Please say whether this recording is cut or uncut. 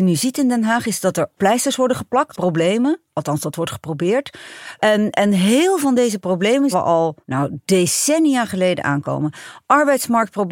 cut